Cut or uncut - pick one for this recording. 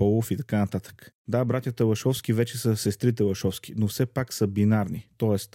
cut